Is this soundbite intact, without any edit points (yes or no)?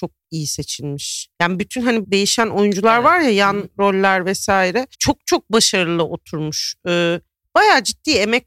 no